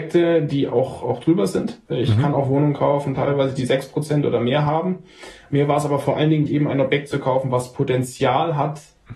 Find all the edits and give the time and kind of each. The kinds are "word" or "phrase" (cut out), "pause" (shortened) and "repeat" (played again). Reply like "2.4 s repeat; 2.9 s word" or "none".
1.8 s pause; 6.5 s word